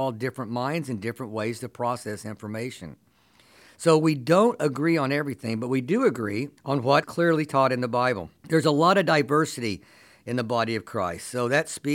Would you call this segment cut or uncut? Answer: cut